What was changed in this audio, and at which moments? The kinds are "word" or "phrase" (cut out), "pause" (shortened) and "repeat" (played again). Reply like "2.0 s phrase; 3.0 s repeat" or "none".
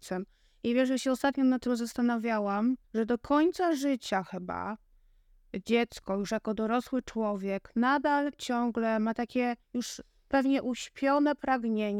2.8 s pause; 9.6 s pause